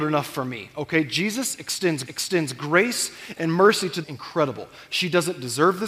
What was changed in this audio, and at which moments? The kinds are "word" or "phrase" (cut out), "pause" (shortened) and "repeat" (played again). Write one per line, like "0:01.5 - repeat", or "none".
0:02.1 - repeat
0:04.0 - phrase